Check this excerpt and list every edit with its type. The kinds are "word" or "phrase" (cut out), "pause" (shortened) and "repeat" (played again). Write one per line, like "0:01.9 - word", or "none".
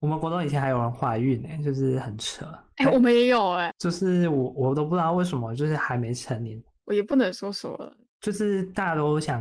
0:03.7 - word